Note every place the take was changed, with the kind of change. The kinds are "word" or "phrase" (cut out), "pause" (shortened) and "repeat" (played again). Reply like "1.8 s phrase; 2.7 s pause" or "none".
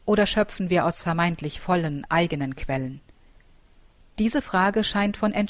none